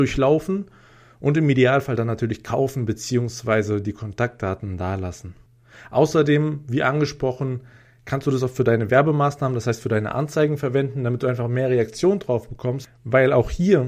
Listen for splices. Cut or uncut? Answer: uncut